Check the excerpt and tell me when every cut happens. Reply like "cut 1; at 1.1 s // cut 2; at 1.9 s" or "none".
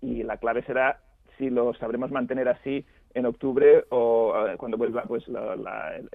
cut 1; at 5.2 s